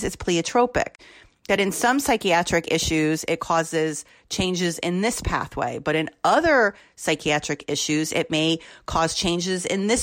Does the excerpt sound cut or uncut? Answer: uncut